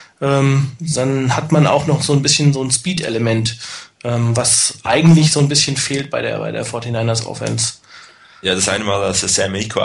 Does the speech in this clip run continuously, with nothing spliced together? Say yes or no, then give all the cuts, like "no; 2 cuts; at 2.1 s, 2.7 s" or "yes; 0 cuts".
yes; 0 cuts